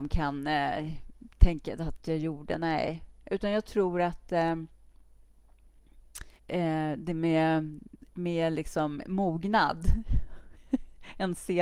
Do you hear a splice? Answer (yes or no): yes